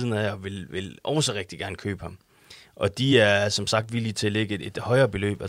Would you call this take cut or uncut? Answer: uncut